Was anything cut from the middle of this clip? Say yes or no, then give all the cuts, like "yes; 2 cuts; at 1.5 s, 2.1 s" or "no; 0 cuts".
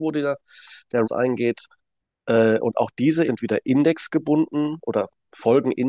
yes; 2 cuts; at 1.0 s, 3.3 s